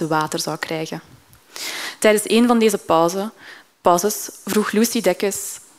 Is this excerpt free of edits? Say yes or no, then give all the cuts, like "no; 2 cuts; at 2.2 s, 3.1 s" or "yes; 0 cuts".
yes; 0 cuts